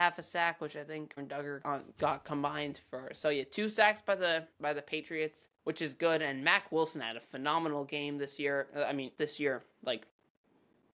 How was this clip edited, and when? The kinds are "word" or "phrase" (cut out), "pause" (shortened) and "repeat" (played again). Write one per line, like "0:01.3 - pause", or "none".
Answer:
0:01.2 - word
0:01.6 - word
0:04.5 - pause
0:05.5 - pause
0:09.2 - word
0:09.7 - pause